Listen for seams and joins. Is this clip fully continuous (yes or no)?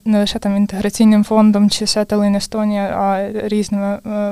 yes